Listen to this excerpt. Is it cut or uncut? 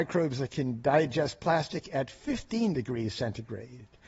uncut